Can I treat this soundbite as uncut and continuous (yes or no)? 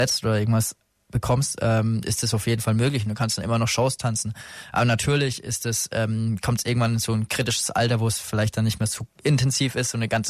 yes